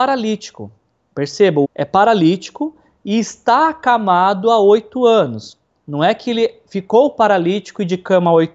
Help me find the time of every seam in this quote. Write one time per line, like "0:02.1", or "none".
0:01.6